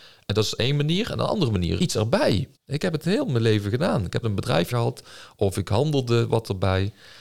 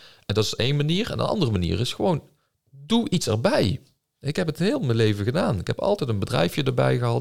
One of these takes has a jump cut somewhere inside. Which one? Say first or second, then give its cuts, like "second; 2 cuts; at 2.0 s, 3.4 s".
first; 4 cuts; at 1.8 s, 2.6 s, 4.2 s, 4.7 s